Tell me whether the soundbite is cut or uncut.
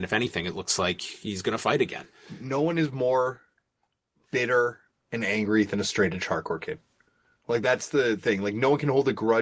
uncut